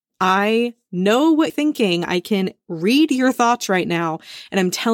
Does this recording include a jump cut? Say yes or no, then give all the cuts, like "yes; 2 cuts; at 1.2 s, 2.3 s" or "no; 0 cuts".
yes; 1 cut; at 1.5 s